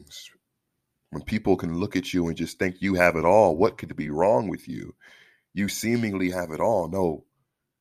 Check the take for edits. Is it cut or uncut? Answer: uncut